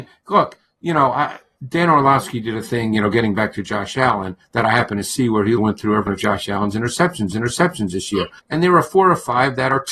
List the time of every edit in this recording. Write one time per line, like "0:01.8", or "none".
0:05.6
0:06.1
0:07.3
0:08.4